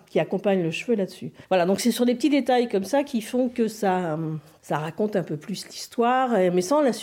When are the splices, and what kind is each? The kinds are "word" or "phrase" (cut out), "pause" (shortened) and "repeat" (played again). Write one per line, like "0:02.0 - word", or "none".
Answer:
0:01.4 - pause

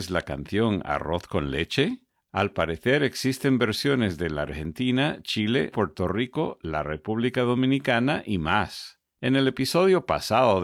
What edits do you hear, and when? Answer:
0:05.7 - word

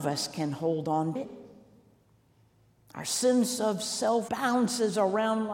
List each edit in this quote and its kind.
0:01.2 - word
0:04.3 - word

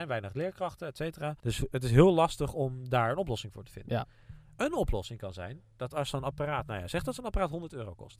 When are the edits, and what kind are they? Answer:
0:01.4 - pause

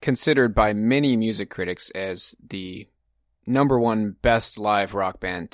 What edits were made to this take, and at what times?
none

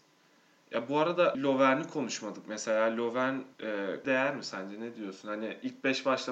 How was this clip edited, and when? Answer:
0:01.3 - word
0:03.5 - pause
0:04.0 - word

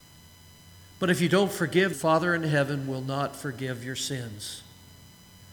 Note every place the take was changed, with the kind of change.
0:01.9 - phrase

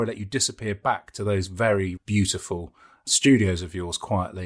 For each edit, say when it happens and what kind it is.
0:02.0 - word

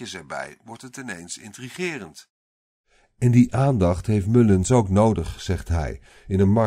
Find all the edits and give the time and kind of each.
none

